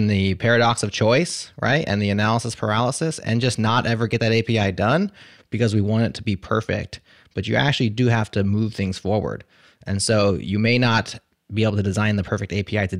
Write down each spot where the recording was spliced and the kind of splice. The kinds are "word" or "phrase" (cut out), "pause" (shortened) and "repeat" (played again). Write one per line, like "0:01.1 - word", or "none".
none